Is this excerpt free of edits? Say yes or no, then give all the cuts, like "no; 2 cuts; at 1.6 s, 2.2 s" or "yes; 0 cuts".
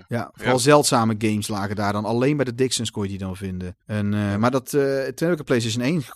no; 1 cut; at 3.8 s